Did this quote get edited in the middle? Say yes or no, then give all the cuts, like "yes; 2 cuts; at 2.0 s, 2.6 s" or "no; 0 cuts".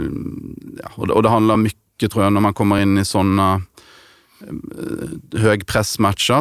no; 0 cuts